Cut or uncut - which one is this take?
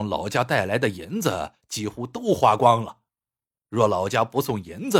uncut